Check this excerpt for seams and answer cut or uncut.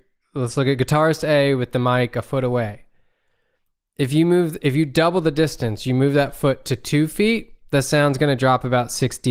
uncut